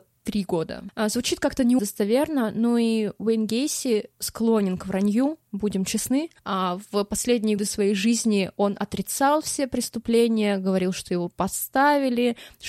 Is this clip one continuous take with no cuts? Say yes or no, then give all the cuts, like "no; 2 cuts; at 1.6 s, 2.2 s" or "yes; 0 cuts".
no; 4 cuts; at 1.8 s, 4.1 s, 6.4 s, 7.6 s